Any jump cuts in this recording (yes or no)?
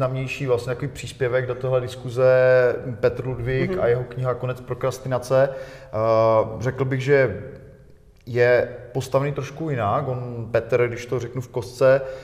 no